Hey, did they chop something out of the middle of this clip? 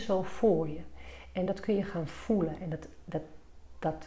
no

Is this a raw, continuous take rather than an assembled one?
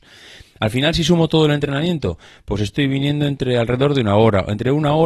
yes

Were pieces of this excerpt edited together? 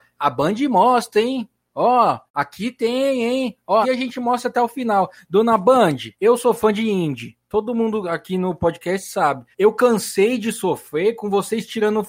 yes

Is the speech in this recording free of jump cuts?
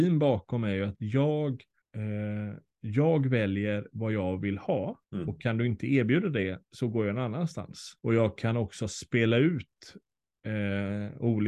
no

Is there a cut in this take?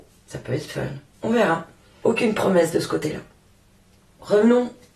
no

